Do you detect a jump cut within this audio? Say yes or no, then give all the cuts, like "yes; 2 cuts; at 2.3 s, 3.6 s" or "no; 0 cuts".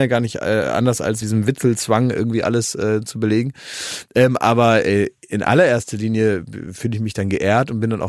yes; 1 cut; at 1.2 s